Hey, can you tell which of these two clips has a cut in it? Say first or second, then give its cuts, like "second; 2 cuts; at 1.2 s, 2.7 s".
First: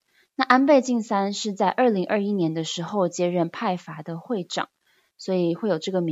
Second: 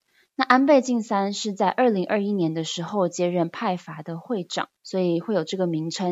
second; 1 cut; at 4.8 s